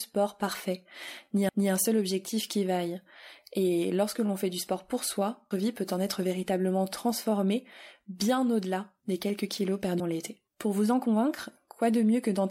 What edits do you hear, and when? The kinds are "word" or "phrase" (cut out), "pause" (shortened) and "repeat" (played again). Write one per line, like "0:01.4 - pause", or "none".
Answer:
0:01.5 - repeat
0:05.5 - word
0:10.0 - word
0:10.5 - pause